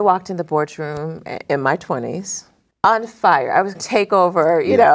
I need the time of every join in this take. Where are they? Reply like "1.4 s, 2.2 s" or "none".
2.7 s, 3.7 s